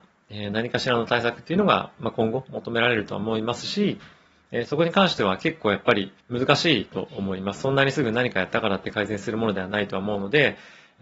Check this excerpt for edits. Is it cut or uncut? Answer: cut